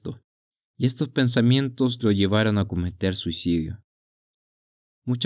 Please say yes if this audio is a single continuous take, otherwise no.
yes